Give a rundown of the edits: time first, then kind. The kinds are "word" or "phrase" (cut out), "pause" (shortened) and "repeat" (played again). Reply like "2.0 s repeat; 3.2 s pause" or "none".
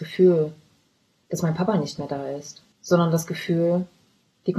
2.7 s pause